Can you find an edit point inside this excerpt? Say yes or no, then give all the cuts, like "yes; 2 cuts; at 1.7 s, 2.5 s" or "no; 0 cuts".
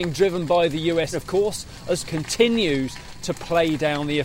yes; 2 cuts; at 1.1 s, 2.1 s